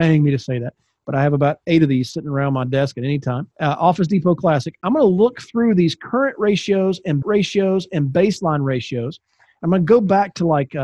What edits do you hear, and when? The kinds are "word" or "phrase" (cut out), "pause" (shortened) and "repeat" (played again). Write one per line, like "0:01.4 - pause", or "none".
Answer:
0:03.5 - pause
0:07.2 - repeat